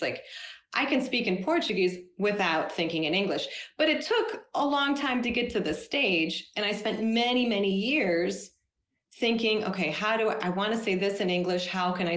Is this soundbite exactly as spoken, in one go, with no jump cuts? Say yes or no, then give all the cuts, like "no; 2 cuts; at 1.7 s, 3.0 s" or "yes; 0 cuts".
yes; 0 cuts